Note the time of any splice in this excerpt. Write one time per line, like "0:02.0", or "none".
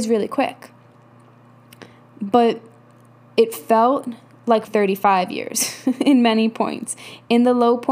0:01.9
0:04.7